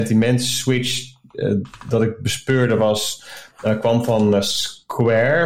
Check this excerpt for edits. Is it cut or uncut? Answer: uncut